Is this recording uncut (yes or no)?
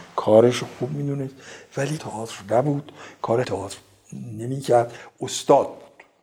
no